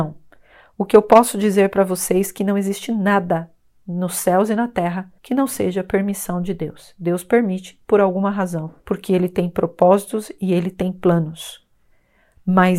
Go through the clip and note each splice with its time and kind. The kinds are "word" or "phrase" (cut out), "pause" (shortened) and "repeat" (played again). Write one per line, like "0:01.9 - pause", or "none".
0:03.7 - pause
0:05.2 - pause
0:08.8 - pause